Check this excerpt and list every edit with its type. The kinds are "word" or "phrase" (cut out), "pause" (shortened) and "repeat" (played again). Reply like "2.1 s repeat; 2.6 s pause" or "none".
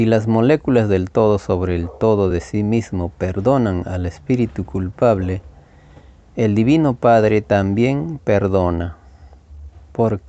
none

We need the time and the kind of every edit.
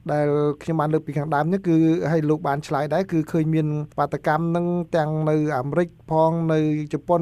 3.9 s pause

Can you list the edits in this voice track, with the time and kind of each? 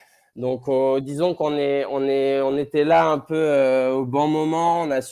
none

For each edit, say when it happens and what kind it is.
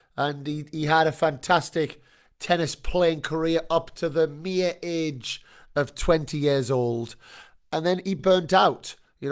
none

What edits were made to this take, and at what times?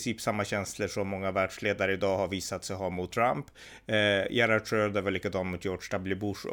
3.1 s word

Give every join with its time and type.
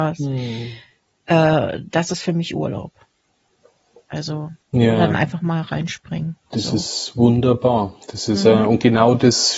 4.6 s pause; 8.0 s pause

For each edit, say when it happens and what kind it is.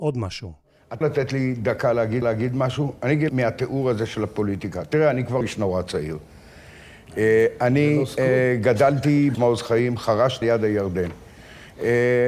1.0 s word; 2.2 s repeat; 3.3 s word; 5.4 s word; 9.3 s word; 10.4 s phrase

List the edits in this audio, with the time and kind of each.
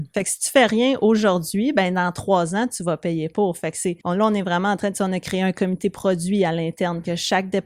4.0 s pause

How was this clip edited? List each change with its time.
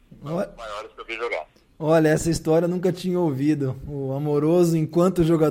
none

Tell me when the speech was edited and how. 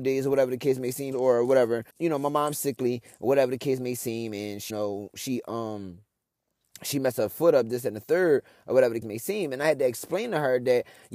1.1 s word; 1.9 s word; 4.7 s word; 9.0 s word

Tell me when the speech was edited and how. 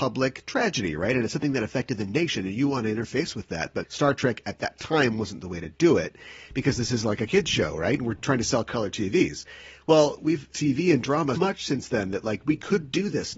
3.8 s word; 10.5 s word; 11.4 s word

